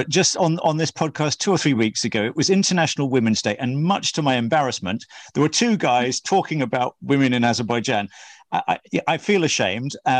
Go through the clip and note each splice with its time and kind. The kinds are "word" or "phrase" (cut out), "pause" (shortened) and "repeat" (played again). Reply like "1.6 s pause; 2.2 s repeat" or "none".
none